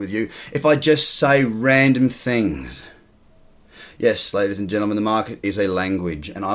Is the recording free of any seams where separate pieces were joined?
yes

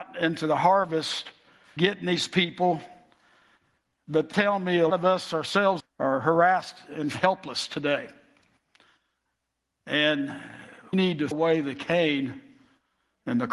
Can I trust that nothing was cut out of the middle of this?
no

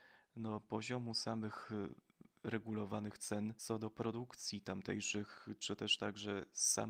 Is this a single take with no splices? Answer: yes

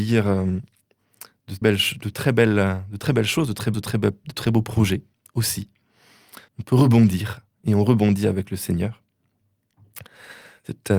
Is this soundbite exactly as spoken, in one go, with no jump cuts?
no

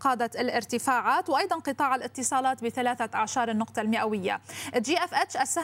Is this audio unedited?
yes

